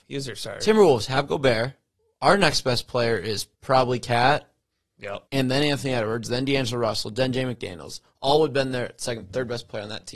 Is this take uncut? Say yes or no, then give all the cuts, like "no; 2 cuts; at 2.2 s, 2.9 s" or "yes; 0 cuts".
no; 3 cuts; at 1.9 s, 3.5 s, 5.3 s